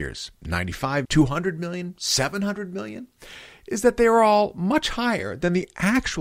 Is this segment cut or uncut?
cut